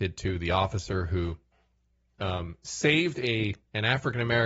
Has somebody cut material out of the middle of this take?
no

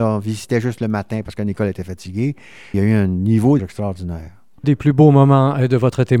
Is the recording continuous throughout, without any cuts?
no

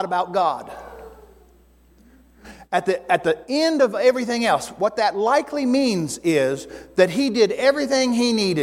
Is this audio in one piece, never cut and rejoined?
yes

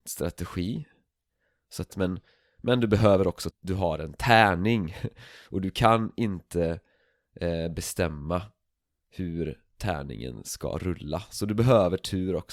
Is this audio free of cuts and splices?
no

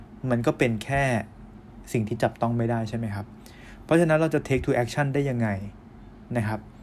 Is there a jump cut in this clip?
no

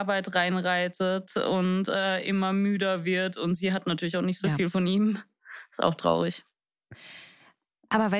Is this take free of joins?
yes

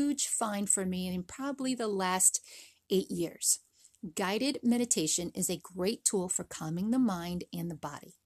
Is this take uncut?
yes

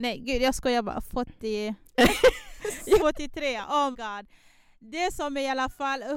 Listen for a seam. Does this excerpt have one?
yes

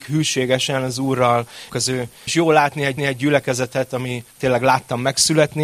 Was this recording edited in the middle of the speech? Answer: yes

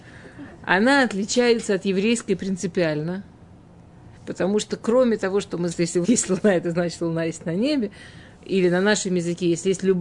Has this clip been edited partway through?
yes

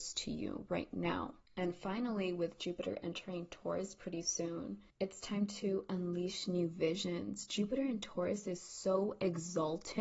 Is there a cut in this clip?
yes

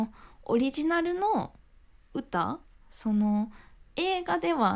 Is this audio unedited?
yes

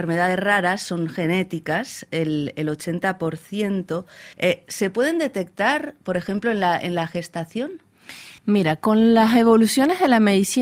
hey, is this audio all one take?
no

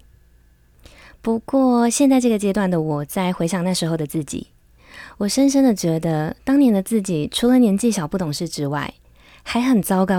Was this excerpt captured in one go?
yes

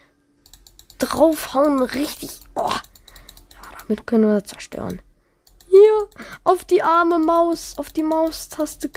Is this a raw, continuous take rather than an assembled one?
yes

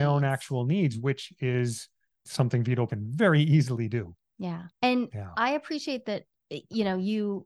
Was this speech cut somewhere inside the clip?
yes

